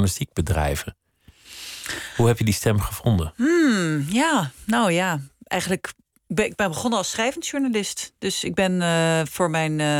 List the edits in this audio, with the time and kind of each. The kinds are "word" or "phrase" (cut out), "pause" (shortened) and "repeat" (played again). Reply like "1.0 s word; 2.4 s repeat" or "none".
none